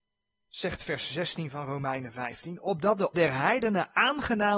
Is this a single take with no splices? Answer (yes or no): no